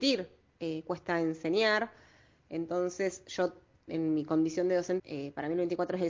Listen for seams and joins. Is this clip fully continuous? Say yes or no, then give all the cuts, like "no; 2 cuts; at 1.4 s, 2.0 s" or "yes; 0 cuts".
no; 2 cuts; at 3.9 s, 5.0 s